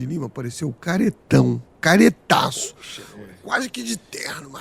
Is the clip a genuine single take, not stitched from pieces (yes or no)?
yes